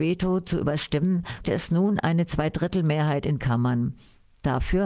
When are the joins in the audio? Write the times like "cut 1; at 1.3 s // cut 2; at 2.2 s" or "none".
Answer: cut 1; at 1.4 s // cut 2; at 3.4 s